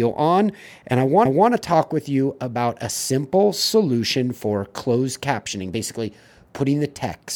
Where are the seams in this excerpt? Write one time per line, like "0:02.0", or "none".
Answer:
0:01.3

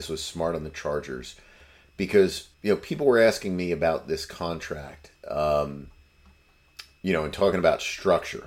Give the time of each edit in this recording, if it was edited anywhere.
0:02.5

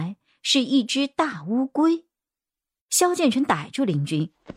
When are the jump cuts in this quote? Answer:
none

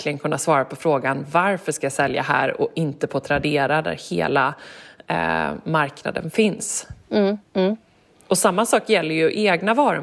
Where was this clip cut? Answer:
0:07.5

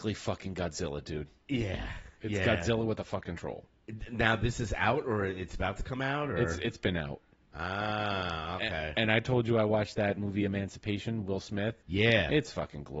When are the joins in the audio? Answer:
0:11.8

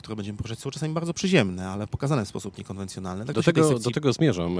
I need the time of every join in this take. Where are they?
0:03.3

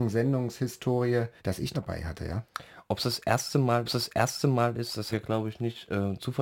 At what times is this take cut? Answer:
0:01.4
0:01.7
0:03.8
0:05.1

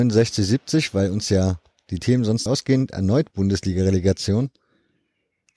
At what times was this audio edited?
0:02.5

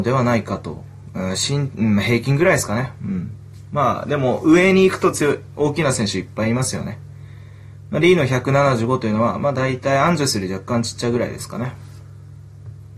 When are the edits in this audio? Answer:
none

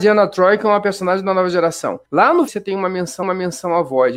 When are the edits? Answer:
0:02.1
0:02.5
0:03.2

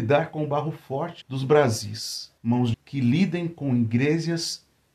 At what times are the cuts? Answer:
0:01.2
0:02.4
0:02.7

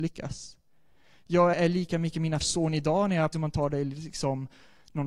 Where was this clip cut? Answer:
0:01.5
0:02.4
0:03.3

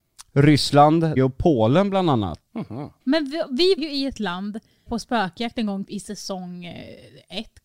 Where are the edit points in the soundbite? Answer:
0:01.2
0:02.5
0:03.0
0:03.8
0:04.9
0:05.8

